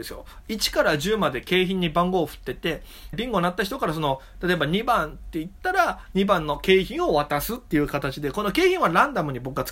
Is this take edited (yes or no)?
yes